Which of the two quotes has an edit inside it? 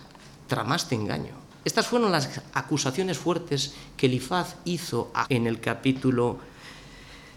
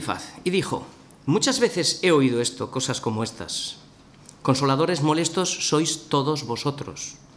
first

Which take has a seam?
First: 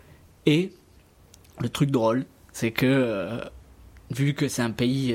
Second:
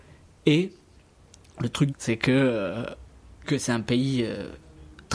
second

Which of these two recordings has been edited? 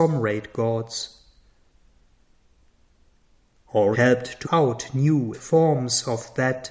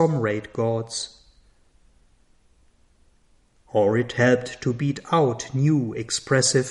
first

